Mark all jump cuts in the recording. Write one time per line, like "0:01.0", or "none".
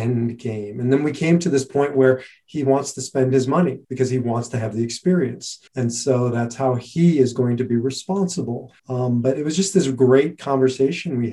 0:03.8
0:05.7
0:08.8

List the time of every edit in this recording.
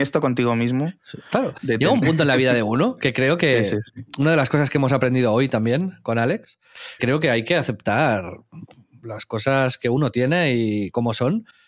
0:07.0

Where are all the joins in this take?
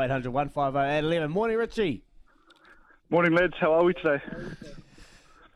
none

